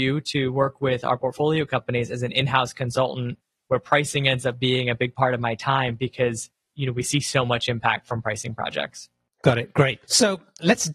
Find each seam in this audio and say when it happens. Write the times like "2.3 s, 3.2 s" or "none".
none